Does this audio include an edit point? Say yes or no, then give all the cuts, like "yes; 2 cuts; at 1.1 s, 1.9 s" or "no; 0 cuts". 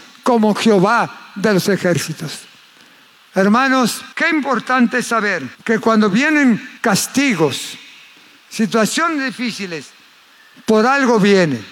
yes; 3 cuts; at 4.1 s, 5.5 s, 6.8 s